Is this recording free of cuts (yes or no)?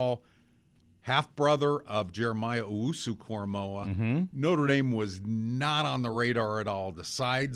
yes